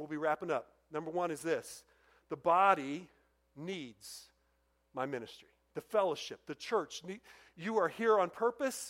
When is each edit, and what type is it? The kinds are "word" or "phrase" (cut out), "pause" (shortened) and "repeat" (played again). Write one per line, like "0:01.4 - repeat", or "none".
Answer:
none